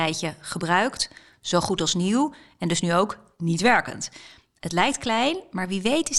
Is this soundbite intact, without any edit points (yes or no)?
yes